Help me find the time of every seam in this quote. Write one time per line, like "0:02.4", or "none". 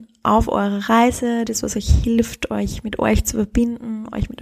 none